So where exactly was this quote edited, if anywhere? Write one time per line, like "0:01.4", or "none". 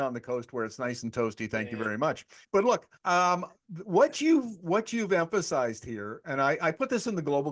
0:02.4
0:03.0